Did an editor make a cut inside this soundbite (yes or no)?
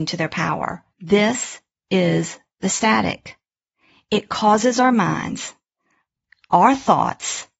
yes